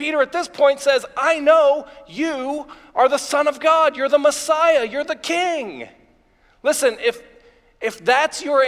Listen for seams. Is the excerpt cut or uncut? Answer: uncut